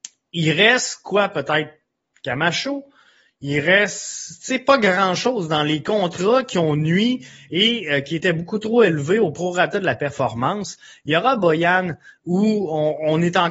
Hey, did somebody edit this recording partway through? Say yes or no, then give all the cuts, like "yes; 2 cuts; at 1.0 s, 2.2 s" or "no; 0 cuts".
no; 0 cuts